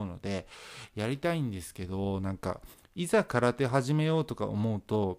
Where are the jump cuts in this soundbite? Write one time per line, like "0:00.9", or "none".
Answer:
0:02.7